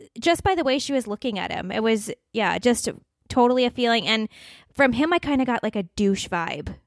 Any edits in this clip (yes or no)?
no